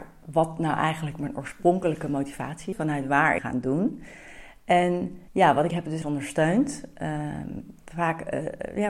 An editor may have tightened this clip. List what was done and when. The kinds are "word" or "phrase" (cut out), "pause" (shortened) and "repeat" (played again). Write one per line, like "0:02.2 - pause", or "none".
0:02.7 - word
0:03.4 - phrase
0:05.3 - pause
0:05.7 - phrase
0:06.0 - phrase